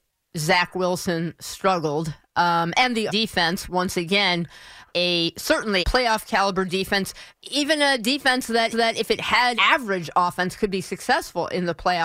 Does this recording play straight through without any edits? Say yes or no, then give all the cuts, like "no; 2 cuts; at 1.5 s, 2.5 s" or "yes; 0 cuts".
no; 6 cuts; at 3.1 s, 4.9 s, 5.8 s, 7.3 s, 8.7 s, 9.6 s